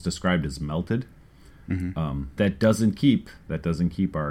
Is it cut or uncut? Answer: cut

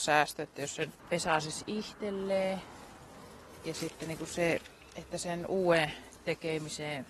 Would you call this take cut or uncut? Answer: uncut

